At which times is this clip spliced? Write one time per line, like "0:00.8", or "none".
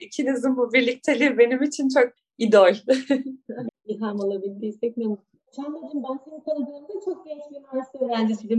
0:02.2
0:03.7
0:05.5